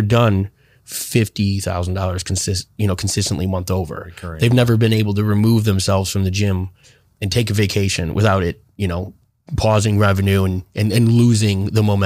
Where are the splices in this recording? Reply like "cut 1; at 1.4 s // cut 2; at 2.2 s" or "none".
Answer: none